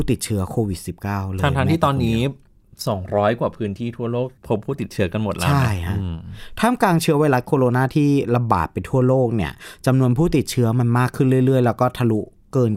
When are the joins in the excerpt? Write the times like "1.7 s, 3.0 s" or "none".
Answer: 4.4 s